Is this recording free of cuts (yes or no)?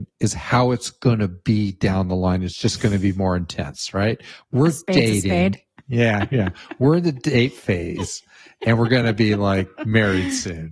yes